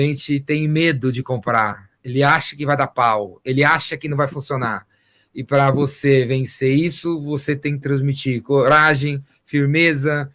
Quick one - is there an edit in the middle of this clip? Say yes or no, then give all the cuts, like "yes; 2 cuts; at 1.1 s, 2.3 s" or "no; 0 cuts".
no; 0 cuts